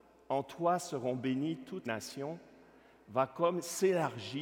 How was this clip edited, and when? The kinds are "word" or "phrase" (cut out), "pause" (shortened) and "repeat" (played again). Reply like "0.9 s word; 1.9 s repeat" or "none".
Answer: 1.9 s word

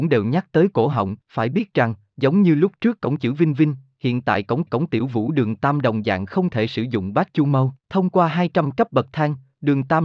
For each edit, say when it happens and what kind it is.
1.2 s pause; 4.7 s repeat; 7.8 s pause

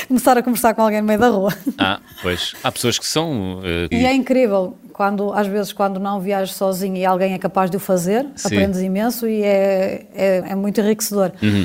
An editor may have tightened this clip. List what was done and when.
3.9 s phrase; 10.4 s word

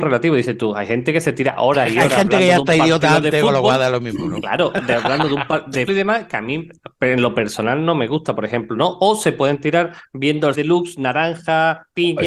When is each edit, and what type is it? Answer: 5.9 s word; 10.5 s word

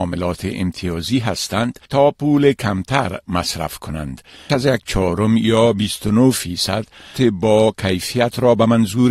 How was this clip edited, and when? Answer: 1.9 s pause; 4.5 s word; 7.2 s word

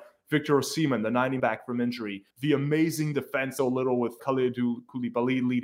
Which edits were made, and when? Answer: 1.4 s phrase; 2.3 s pause; 3.6 s phrase; 4.2 s word

